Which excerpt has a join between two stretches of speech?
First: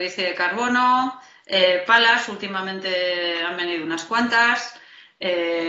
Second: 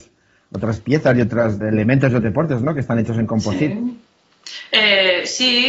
second; 2 cuts; at 1.6 s, 2.2 s

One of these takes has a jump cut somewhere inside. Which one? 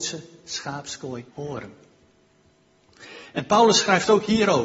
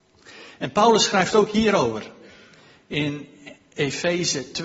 first; 1 cut; at 1.3 s

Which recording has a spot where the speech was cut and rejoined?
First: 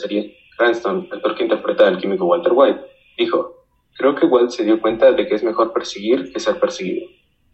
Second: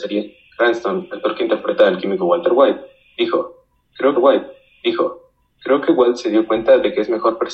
second; 1 cut; at 4.1 s

